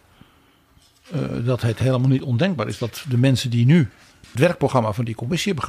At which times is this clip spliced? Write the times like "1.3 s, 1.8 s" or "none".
none